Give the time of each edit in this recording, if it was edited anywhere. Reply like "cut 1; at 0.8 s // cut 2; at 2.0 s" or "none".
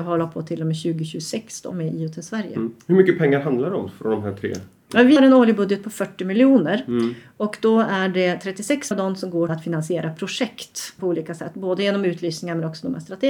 cut 1; at 1.7 s // cut 2; at 5.2 s // cut 3; at 8.9 s // cut 4; at 9.5 s // cut 5; at 11.0 s